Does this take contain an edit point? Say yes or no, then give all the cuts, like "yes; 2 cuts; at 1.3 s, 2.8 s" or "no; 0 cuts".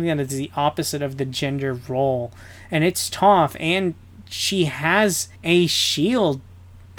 yes; 1 cut; at 5.4 s